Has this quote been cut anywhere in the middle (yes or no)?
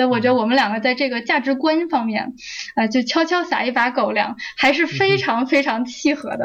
no